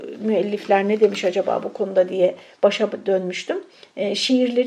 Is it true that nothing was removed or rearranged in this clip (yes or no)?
yes